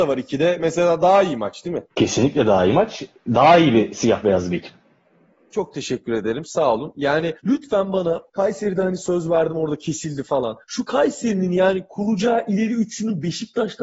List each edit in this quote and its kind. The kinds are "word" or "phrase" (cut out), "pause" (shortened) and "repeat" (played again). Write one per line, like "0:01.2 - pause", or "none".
0:01.9 - pause
0:07.4 - pause
0:08.3 - pause
0:10.6 - pause